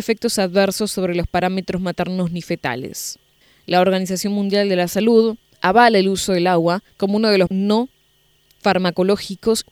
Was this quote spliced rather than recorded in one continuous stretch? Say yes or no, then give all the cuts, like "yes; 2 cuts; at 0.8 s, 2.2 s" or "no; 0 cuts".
yes; 3 cuts; at 3.4 s, 6.9 s, 7.5 s